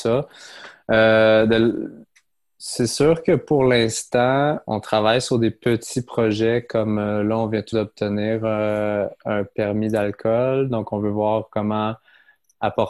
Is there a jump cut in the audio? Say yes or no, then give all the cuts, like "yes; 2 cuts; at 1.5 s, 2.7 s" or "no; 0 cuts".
yes; 2 cuts; at 4.7 s, 7.7 s